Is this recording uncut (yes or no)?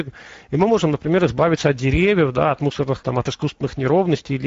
no